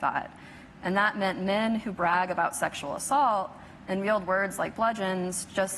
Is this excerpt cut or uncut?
uncut